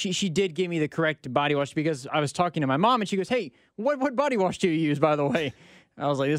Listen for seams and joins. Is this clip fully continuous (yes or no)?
yes